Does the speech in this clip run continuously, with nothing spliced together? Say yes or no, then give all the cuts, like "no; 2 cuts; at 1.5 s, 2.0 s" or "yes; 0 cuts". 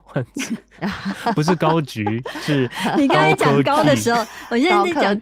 yes; 0 cuts